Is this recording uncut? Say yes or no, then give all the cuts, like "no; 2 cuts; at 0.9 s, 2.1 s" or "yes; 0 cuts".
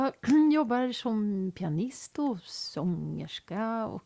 yes; 0 cuts